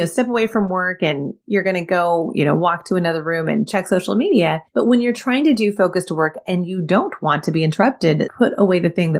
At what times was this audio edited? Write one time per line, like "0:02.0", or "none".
0:04.7
0:08.3

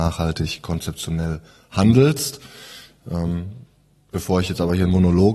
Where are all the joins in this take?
none

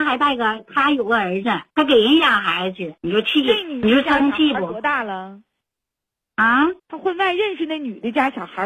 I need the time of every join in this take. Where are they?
0:01.7
0:03.0
0:06.8

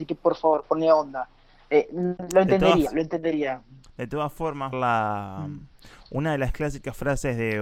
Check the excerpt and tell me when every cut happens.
0:02.2
0:02.9
0:03.8
0:04.7

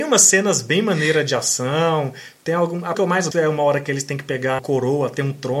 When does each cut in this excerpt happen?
0:02.9
0:03.3
0:04.6

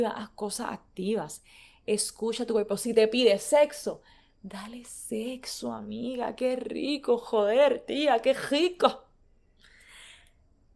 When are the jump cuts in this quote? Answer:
none

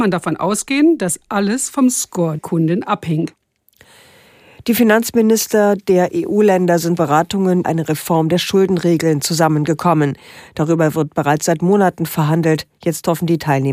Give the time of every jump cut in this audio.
0:02.4
0:07.0
0:07.6

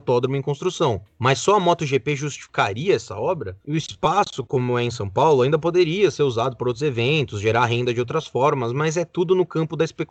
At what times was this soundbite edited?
none

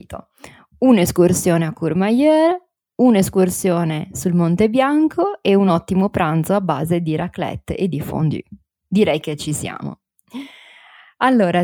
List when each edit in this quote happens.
none

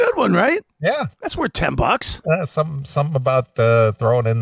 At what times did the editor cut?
0:01.1

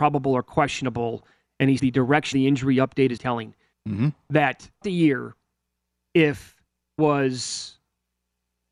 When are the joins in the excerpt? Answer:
0:01.8
0:02.3
0:03.2
0:03.7
0:04.8
0:07.0

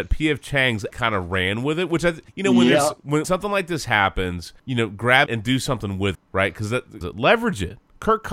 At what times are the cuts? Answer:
0:00.9
0:02.3
0:03.2
0:04.6
0:05.3
0:06.1
0:07.0

